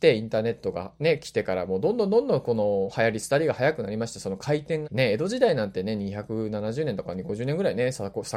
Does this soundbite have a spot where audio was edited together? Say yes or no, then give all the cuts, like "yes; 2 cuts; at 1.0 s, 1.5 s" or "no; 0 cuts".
yes; 1 cut; at 4.8 s